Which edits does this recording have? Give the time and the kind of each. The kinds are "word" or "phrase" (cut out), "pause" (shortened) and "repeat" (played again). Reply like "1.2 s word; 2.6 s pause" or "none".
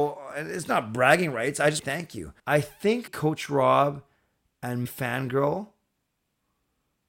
1.8 s phrase; 2.4 s pause; 3.1 s word; 4.9 s word